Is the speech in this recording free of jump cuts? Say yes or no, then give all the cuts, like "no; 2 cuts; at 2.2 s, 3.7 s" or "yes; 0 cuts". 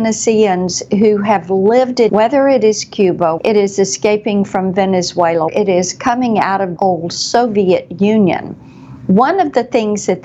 no; 4 cuts; at 2.1 s, 3.4 s, 5.5 s, 6.8 s